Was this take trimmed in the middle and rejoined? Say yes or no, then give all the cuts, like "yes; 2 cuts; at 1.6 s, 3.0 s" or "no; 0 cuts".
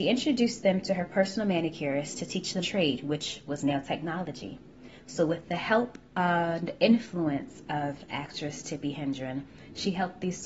yes; 1 cut; at 2.6 s